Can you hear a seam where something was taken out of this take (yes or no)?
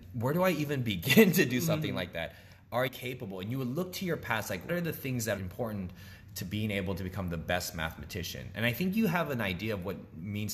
yes